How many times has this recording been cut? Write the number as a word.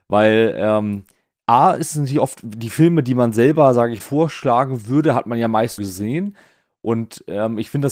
two